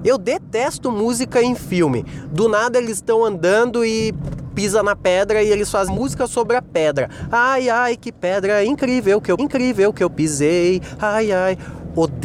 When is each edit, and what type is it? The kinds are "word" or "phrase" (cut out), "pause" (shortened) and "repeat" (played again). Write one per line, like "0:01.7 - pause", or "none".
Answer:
0:05.9 - word
0:09.4 - repeat